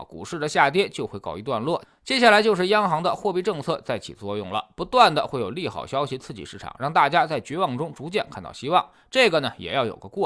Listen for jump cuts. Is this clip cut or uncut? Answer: uncut